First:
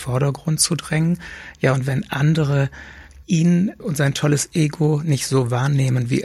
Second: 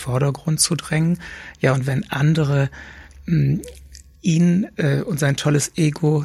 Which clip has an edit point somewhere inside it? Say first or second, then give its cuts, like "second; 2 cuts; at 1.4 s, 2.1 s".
first; 2 cuts; at 3.2 s, 3.8 s